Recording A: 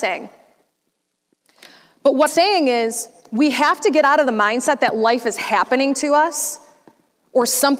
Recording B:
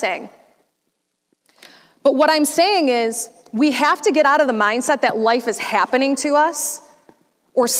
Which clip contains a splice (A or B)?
A